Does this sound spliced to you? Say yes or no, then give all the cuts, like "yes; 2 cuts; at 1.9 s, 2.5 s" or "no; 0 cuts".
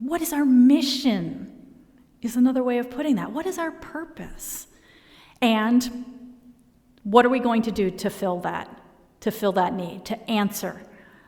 no; 0 cuts